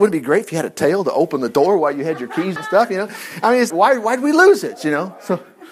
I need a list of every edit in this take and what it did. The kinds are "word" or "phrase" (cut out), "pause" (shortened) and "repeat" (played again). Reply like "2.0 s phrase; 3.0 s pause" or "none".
2.6 s word; 3.7 s word